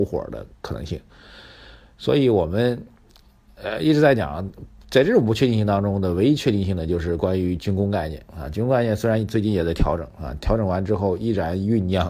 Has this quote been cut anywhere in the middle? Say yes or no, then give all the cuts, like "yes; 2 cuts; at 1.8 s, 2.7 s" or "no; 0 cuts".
no; 0 cuts